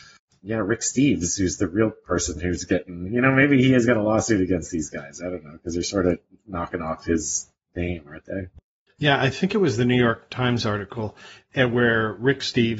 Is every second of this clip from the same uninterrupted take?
yes; 0 cuts

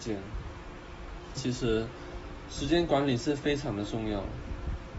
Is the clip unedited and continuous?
no; 1 cut; at 1.4 s

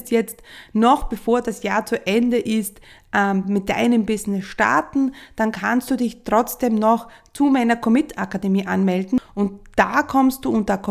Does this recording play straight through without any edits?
yes; 0 cuts

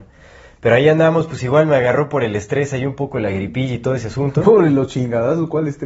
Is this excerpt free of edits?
yes; 0 cuts

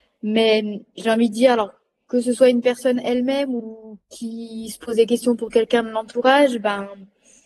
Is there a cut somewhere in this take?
no; 0 cuts

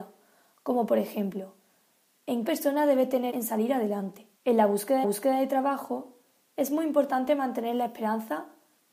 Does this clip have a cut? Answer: yes; 4 cuts; at 2.5 s, 3.3 s, 4.4 s, 5.0 s

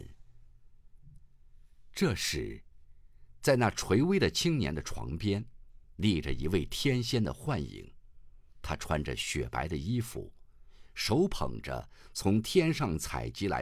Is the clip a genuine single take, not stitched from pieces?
no; 2 cuts; at 5.8 s, 8.5 s

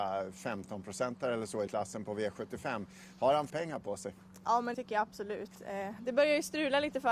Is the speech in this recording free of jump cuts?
no; 3 cuts; at 1.7 s, 3.5 s, 4.7 s

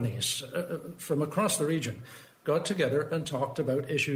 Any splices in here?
no; 0 cuts

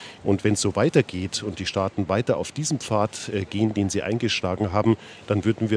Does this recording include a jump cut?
no; 0 cuts

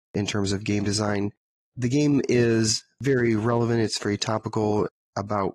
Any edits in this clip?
no; 0 cuts

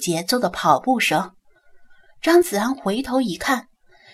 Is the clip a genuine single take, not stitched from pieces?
yes; 0 cuts

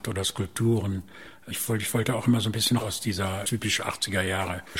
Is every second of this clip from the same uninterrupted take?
no; 2 cuts; at 2.8 s, 3.4 s

